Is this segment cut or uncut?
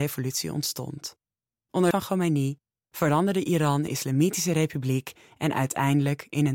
cut